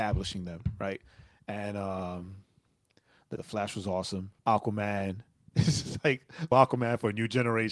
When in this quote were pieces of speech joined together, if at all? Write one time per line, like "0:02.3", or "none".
0:03.4
0:04.4
0:06.5